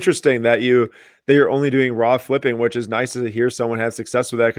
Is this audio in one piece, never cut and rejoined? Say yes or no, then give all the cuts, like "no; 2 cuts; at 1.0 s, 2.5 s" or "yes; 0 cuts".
yes; 0 cuts